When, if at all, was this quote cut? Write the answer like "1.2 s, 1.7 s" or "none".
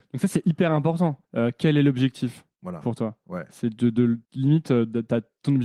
1.2 s, 4.2 s